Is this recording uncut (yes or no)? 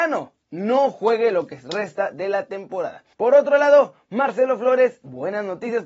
no